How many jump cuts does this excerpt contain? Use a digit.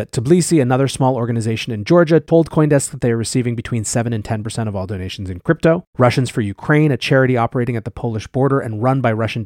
1